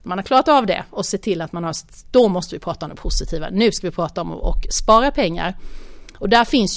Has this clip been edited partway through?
no; 0 cuts

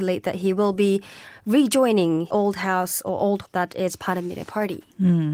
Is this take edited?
yes; 2 cuts; at 2.3 s, 3.4 s

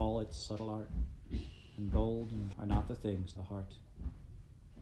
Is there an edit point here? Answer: yes; 2 cuts; at 2.5 s, 3.4 s

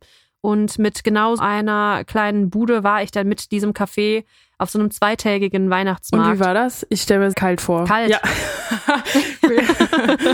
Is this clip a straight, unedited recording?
no; 2 cuts; at 1.4 s, 7.3 s

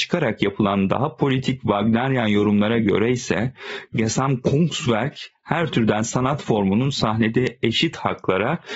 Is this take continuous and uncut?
yes; 0 cuts

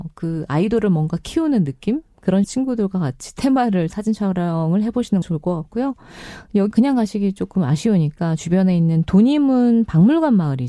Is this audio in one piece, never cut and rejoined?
no; 4 cuts; at 2.4 s, 3.9 s, 5.2 s, 6.7 s

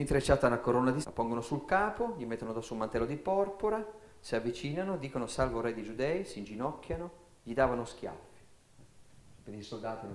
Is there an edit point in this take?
yes; 1 cut; at 1.0 s

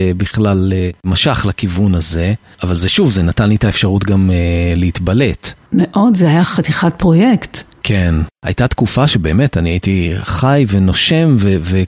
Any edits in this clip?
no; 0 cuts

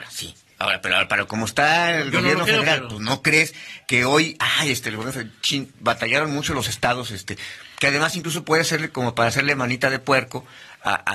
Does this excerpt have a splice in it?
no; 0 cuts

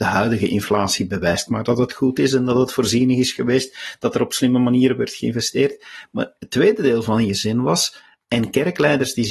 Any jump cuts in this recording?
no; 0 cuts

